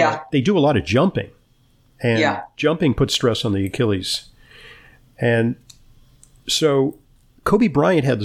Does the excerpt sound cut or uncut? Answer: uncut